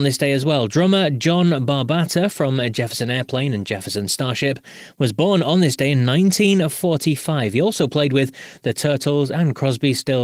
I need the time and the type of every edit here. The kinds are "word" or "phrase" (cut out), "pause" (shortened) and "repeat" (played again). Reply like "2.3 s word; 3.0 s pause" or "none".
none